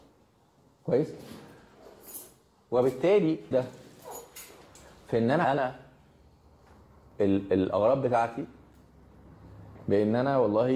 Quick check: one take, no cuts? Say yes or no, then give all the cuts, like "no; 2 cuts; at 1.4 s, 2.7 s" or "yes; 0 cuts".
no; 2 cuts; at 3.5 s, 5.4 s